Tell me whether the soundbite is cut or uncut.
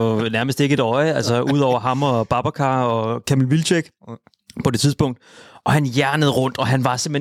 uncut